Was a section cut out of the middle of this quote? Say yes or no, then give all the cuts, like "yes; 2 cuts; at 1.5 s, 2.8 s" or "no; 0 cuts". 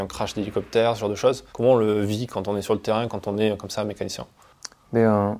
yes; 1 cut; at 1.5 s